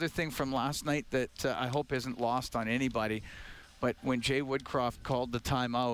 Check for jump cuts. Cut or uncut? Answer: cut